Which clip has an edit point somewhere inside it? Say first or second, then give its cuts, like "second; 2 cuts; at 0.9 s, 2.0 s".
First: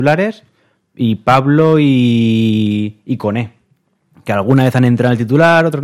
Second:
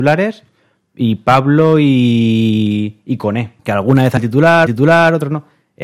second; 3 cuts; at 3.6 s, 4.2 s, 4.7 s